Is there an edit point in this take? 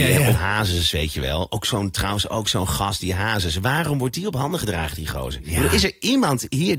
no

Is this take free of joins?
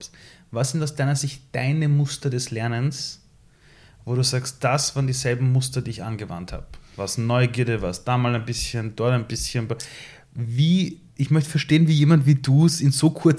yes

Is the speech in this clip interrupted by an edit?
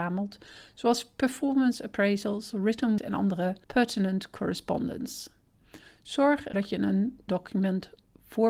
yes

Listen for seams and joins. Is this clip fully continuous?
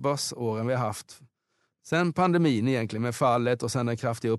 yes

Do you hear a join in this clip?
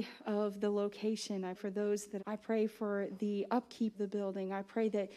yes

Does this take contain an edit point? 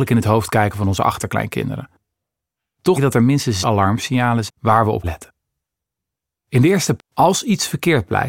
yes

